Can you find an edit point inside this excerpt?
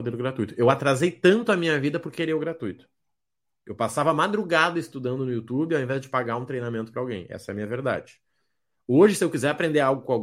no; 0 cuts

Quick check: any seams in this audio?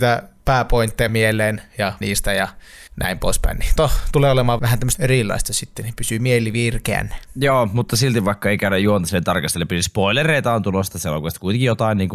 yes; 6 cuts; at 1.1 s, 2.0 s, 2.9 s, 3.8 s, 4.6 s, 4.9 s

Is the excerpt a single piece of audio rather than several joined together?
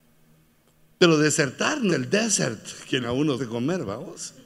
no; 3 cuts; at 1.9 s, 3.0 s, 3.4 s

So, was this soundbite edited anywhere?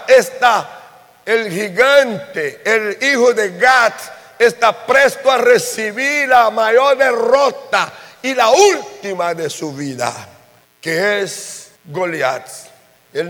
yes; 2 cuts; at 10.6 s, 11.7 s

